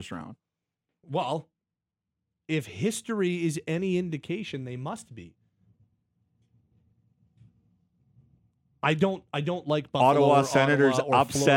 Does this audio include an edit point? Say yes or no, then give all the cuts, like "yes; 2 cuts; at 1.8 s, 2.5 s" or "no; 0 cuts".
no; 0 cuts